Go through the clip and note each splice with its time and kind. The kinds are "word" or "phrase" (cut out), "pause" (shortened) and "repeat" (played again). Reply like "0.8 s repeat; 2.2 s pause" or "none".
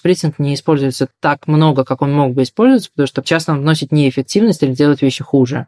3.2 s word